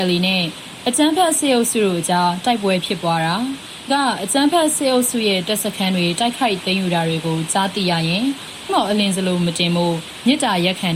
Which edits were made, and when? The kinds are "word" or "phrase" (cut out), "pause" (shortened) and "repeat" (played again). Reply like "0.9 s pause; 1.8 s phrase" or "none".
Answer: 3.9 s word; 8.7 s word